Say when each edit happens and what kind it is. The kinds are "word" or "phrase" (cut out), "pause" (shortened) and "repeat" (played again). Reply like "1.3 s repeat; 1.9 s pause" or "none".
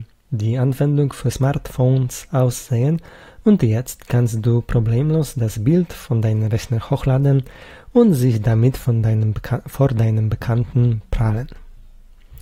none